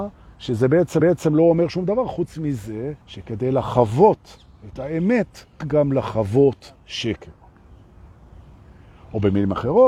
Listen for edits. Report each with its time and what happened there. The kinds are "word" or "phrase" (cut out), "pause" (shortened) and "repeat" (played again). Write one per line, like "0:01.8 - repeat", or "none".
0:01.0 - repeat
0:03.0 - pause
0:05.6 - word
0:06.8 - pause